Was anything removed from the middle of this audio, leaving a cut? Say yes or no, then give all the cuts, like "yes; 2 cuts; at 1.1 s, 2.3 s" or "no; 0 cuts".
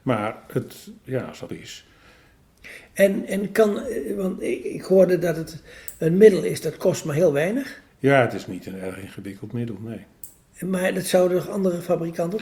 yes; 3 cuts; at 1.5 s, 4.6 s, 7.9 s